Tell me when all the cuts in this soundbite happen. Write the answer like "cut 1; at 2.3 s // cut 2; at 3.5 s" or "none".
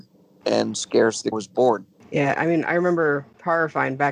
cut 1; at 1.3 s // cut 2; at 1.9 s